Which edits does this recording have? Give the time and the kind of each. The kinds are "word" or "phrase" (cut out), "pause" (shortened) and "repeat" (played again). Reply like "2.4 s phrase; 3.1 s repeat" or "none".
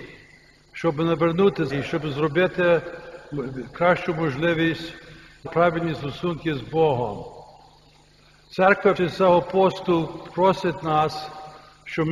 1.7 s word; 3.7 s word; 5.5 s phrase; 9.0 s word